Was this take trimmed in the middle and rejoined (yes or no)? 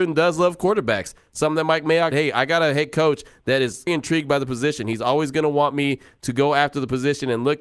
yes